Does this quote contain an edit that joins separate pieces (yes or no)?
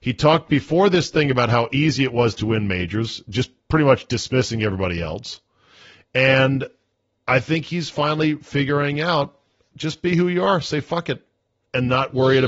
no